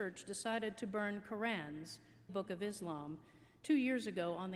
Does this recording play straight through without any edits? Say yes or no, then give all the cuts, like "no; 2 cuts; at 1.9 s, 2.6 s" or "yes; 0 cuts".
no; 1 cut; at 2.3 s